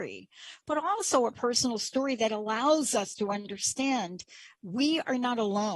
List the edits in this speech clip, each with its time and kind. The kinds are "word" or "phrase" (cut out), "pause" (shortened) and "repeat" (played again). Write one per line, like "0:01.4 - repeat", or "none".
0:04.5 - word